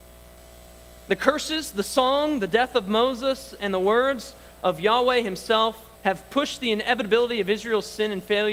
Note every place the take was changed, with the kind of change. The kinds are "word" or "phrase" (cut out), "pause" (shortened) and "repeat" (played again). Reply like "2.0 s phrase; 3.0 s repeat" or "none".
6.0 s pause